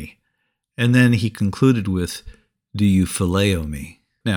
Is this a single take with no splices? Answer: yes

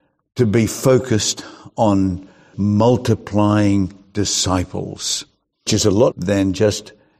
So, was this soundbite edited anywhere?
yes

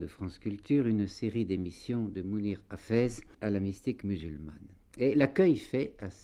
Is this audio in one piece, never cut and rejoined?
no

